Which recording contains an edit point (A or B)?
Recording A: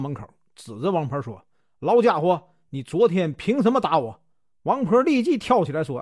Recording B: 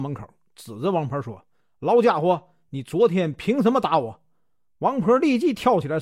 A